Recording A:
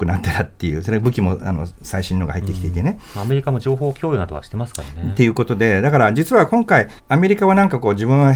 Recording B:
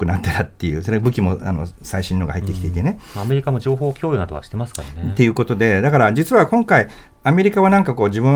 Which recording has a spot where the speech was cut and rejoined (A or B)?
A